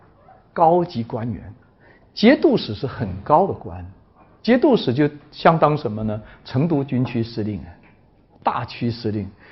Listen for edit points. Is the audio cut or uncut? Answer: uncut